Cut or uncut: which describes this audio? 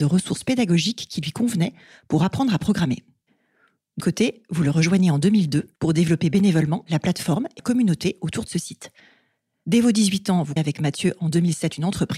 cut